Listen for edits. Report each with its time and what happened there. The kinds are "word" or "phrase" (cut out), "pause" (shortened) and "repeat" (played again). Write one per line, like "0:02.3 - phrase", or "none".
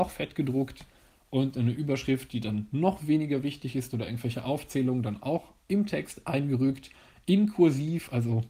none